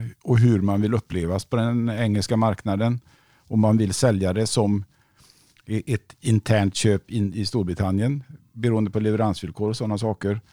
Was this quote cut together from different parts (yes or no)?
no